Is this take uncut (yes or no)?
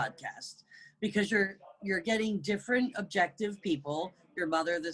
yes